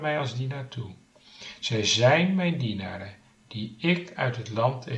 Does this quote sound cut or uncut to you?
uncut